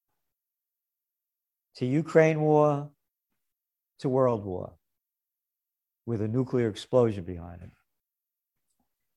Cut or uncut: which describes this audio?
uncut